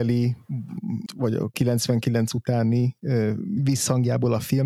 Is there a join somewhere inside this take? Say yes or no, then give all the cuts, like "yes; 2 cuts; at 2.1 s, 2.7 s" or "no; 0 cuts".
yes; 2 cuts; at 1.1 s, 1.5 s